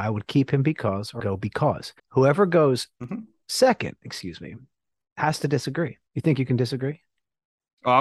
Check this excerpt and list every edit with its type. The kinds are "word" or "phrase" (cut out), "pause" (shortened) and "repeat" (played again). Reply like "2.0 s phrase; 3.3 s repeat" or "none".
1.2 s phrase; 2.0 s pause; 6.1 s pause